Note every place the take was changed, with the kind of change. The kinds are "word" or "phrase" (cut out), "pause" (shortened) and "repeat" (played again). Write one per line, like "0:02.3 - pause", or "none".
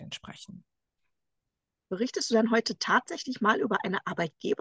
none